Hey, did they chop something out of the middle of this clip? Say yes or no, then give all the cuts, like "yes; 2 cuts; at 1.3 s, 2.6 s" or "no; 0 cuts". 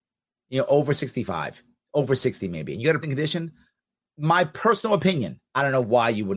yes; 3 cuts; at 1.8 s, 3.0 s, 5.5 s